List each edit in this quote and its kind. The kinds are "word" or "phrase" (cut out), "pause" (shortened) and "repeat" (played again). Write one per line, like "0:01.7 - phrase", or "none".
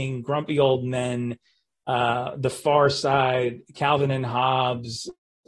none